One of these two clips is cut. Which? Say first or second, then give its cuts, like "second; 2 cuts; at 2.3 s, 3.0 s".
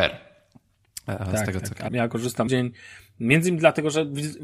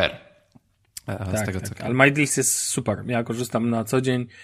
first; 2 cuts; at 1.9 s, 2.5 s